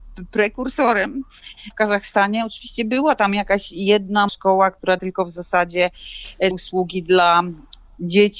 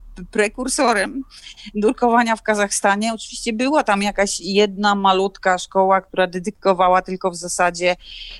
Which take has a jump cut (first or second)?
first